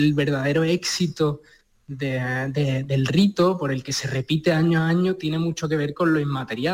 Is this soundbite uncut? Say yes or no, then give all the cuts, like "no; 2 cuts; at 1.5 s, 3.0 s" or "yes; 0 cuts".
yes; 0 cuts